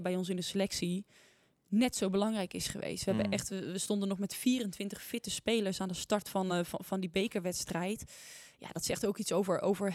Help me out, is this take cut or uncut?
uncut